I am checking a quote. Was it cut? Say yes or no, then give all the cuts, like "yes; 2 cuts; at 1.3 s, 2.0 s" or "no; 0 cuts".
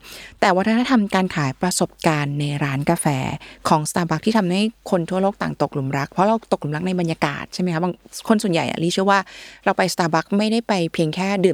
no; 0 cuts